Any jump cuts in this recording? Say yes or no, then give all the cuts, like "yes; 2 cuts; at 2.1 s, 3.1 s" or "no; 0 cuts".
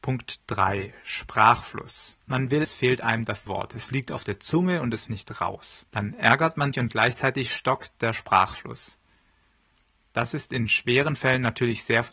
yes; 6 cuts; at 2.2 s, 2.6 s, 3.5 s, 5.1 s, 5.9 s, 6.7 s